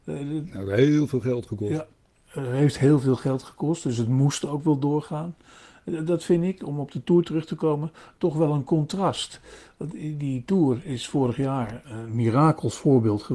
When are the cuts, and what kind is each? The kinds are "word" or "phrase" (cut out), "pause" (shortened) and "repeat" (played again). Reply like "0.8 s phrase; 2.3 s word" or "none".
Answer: 11.8 s word